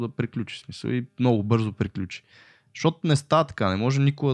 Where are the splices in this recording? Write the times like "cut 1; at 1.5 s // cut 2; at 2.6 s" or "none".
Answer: none